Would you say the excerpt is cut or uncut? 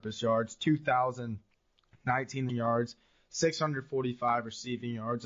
cut